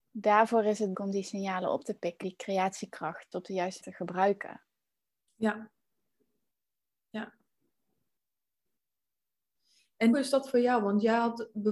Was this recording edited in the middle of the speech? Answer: yes; 5 cuts; at 0.9 s, 2.2 s, 3.3 s, 3.8 s, 10.1 s

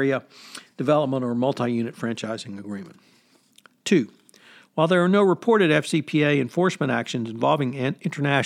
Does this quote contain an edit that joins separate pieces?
no; 0 cuts

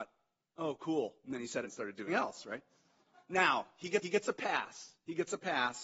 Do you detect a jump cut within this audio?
yes; 3 cuts; at 1.6 s, 2.1 s, 4.0 s

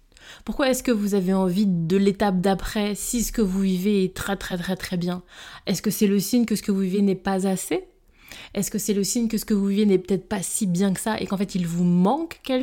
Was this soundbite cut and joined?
no; 0 cuts

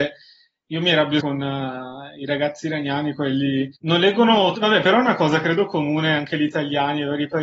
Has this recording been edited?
yes; 3 cuts; at 1.2 s, 3.8 s, 4.5 s

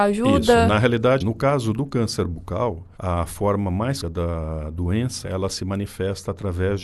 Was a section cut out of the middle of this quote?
yes; 4 cuts; at 1.2 s, 2.9 s, 4.0 s, 5.2 s

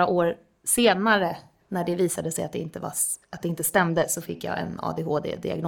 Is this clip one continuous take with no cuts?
yes; 0 cuts

